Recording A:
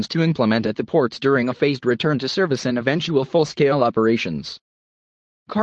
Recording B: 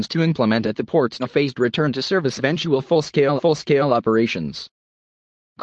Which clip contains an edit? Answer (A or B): B